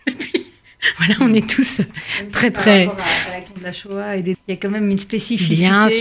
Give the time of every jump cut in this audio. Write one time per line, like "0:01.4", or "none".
0:04.3